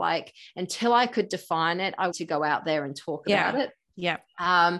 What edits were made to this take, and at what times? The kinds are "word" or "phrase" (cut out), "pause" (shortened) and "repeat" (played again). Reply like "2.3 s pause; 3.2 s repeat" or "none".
2.1 s phrase